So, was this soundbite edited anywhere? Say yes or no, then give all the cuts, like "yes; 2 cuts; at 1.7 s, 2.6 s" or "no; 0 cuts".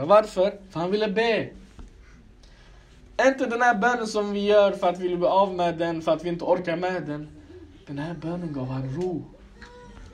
no; 0 cuts